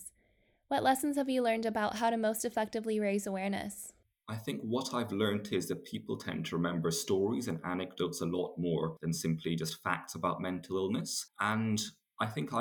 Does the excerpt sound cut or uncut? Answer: uncut